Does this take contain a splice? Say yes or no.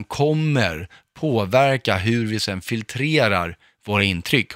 no